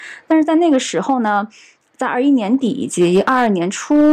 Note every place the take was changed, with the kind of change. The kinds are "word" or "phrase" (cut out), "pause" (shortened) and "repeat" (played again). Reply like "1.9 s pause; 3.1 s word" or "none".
none